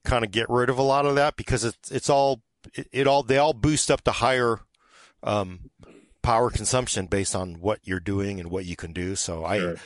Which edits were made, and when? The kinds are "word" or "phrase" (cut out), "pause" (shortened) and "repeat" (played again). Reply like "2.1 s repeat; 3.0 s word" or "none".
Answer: none